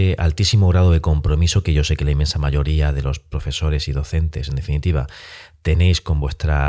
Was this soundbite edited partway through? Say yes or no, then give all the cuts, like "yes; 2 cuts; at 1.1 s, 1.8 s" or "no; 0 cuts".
no; 0 cuts